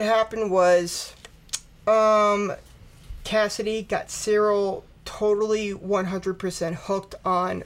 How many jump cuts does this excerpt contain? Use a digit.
0